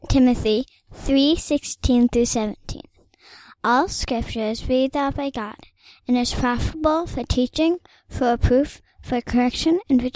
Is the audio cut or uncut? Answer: uncut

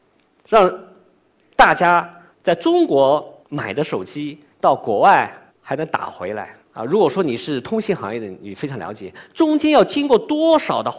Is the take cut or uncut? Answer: cut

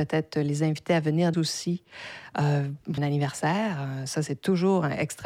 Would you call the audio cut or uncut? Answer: cut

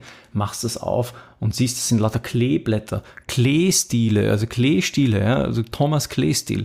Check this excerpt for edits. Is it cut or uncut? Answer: uncut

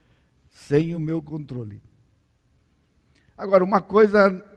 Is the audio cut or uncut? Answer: uncut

